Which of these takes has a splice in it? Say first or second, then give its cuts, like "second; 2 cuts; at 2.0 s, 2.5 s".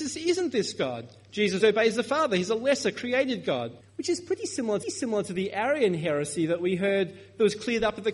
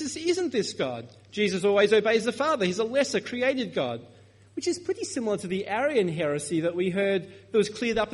first; 3 cuts; at 1.6 s, 3.8 s, 4.8 s